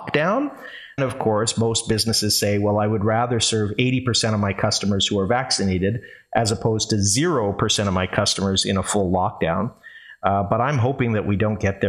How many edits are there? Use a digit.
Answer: 1